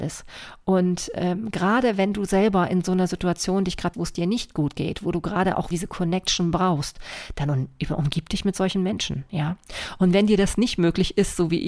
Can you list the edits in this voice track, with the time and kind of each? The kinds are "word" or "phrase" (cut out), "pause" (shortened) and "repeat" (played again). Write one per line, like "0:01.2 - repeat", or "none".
0:03.9 - word
0:05.7 - word